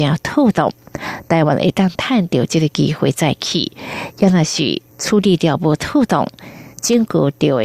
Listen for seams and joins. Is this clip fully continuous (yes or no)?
no